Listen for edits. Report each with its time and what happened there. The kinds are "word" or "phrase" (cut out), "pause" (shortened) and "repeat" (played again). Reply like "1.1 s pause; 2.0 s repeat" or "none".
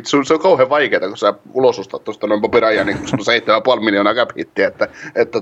none